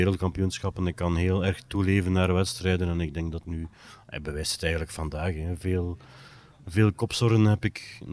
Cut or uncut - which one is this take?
cut